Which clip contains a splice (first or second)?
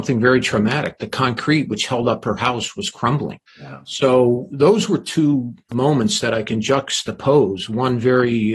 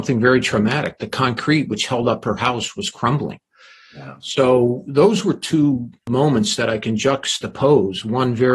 first